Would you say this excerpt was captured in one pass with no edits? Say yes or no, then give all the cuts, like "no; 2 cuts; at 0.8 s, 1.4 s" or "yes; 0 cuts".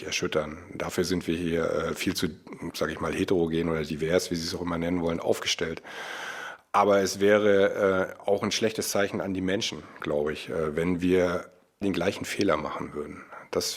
no; 1 cut; at 11.8 s